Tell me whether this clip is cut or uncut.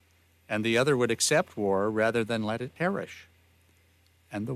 uncut